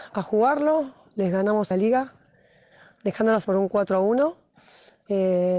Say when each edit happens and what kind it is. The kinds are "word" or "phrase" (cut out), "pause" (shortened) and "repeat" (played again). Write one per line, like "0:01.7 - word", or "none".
0:01.7 - phrase
0:03.4 - word